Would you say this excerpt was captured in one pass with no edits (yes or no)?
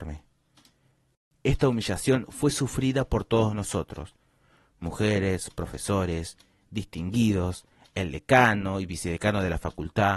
yes